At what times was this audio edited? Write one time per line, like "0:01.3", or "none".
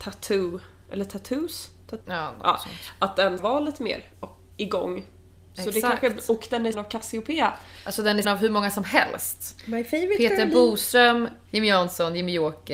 0:02.0
0:03.4
0:04.1
0:04.5
0:06.7
0:08.2
0:11.5